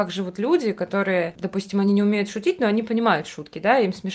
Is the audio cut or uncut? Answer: uncut